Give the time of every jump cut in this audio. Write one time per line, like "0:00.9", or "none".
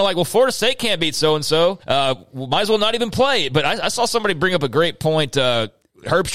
0:01.8

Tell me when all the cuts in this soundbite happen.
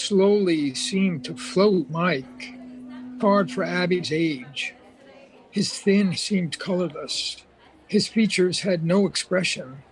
0:01.9
0:03.2
0:04.0
0:06.1

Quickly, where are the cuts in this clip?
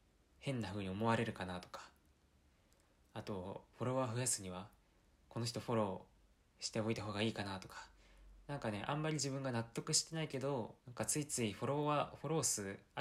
0:06.4
0:10.8

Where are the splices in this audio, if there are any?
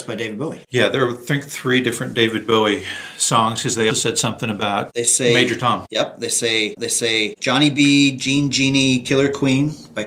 0:03.9
0:06.8

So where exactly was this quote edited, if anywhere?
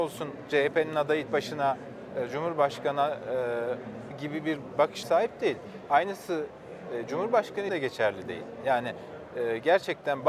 0:01.3
0:04.1
0:05.0
0:07.7

